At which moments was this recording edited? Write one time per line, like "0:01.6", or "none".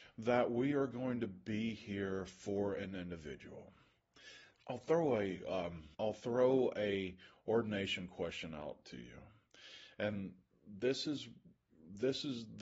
0:04.5
0:05.9